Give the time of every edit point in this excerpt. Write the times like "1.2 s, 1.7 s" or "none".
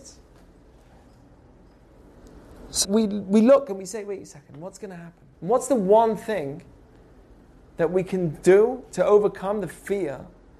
2.8 s, 5.3 s